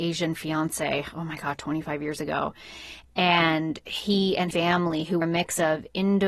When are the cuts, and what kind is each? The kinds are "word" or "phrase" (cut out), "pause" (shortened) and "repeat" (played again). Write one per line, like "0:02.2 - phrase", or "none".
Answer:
0:04.5 - word
0:05.2 - word